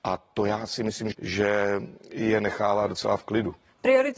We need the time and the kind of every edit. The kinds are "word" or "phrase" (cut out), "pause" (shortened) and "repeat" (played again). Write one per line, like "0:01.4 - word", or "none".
0:01.1 - word